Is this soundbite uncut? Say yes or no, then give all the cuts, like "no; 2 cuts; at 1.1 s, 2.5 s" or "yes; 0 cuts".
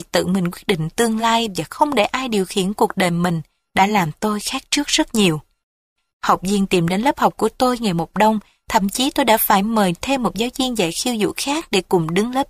yes; 0 cuts